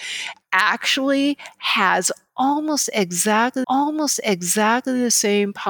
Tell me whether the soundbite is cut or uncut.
cut